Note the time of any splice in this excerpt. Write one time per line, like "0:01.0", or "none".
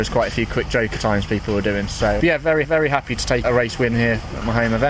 0:02.2
0:02.6
0:03.4